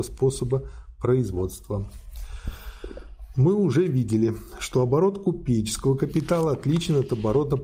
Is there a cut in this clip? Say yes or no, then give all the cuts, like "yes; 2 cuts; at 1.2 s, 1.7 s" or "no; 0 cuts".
no; 0 cuts